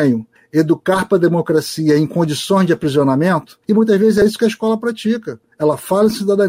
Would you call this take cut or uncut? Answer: uncut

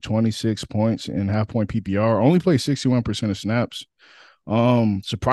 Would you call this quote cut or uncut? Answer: uncut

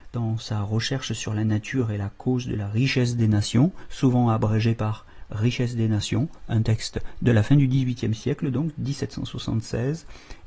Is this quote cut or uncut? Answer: uncut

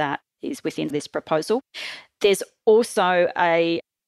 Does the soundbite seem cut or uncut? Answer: cut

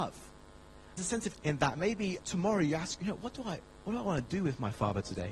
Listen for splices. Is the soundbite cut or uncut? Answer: cut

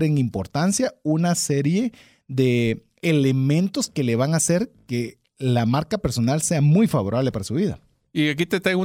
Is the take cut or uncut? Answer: uncut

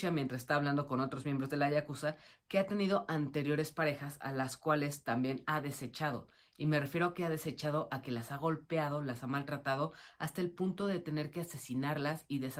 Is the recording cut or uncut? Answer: uncut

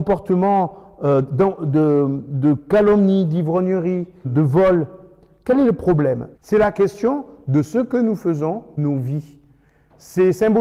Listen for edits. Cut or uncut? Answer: cut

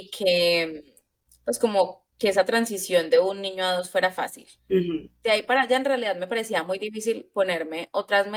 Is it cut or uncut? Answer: cut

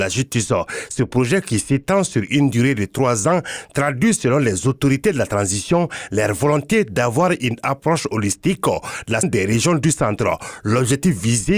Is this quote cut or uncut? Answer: cut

